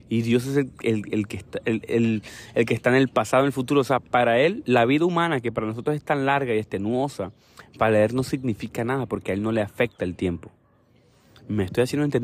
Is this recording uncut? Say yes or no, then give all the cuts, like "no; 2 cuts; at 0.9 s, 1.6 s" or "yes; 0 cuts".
yes; 0 cuts